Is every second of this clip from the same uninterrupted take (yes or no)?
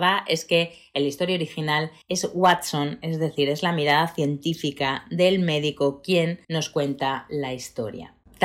no